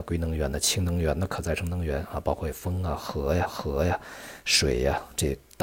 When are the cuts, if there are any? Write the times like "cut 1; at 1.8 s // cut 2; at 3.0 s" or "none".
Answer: cut 1; at 3.5 s